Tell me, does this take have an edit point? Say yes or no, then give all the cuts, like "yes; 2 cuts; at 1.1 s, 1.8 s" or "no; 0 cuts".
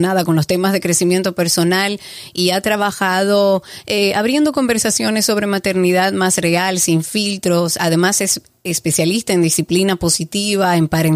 no; 0 cuts